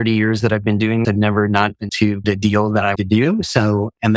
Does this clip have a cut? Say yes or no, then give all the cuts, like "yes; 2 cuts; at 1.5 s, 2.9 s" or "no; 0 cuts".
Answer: yes; 4 cuts; at 1.0 s, 1.9 s, 2.2 s, 3.0 s